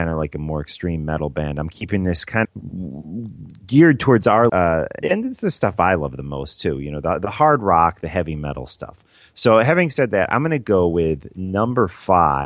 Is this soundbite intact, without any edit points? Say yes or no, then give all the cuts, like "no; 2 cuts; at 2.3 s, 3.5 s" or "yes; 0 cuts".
no; 3 cuts; at 2.4 s, 4.5 s, 5.0 s